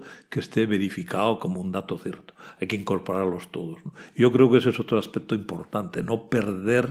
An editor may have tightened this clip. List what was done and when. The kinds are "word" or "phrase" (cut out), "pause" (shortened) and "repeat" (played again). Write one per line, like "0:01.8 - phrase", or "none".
none